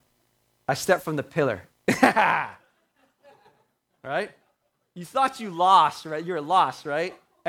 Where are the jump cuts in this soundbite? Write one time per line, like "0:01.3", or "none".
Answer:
0:01.7